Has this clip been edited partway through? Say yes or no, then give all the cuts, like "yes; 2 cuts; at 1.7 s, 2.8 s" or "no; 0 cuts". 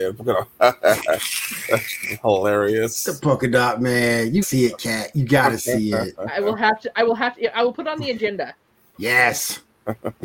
yes; 1 cut; at 4.4 s